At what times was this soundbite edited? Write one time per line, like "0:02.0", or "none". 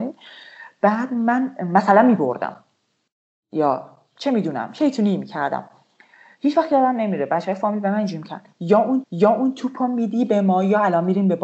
0:09.0